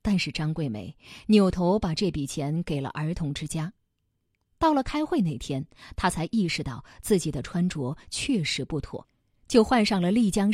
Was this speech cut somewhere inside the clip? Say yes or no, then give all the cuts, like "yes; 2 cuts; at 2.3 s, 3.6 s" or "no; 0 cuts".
no; 0 cuts